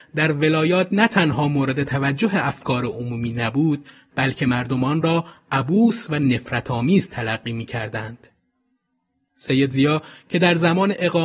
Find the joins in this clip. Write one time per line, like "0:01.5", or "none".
none